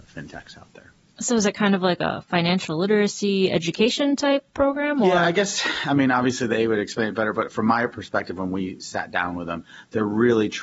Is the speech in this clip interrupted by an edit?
no; 0 cuts

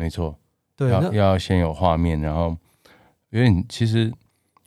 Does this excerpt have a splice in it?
no; 0 cuts

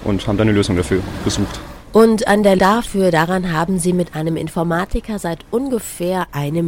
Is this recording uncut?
no; 2 cuts; at 1.8 s, 2.6 s

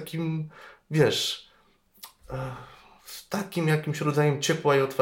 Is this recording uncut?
yes; 0 cuts

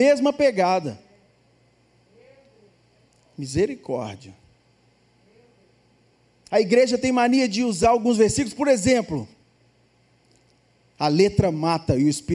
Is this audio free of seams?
yes; 0 cuts

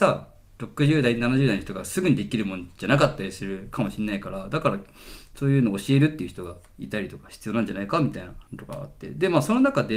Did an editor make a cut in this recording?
yes; 1 cut; at 8.5 s

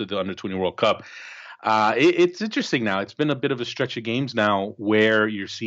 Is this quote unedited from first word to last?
yes; 0 cuts

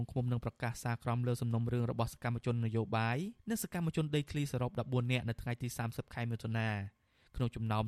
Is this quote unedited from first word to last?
no; 1 cut; at 3.4 s

